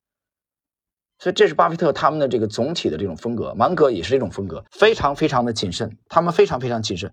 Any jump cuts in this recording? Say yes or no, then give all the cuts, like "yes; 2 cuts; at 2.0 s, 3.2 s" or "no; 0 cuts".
yes; 1 cut; at 4.7 s